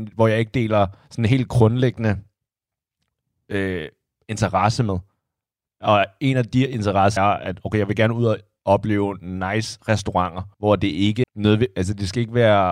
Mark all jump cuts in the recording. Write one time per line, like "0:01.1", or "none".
0:07.2
0:10.5
0:11.2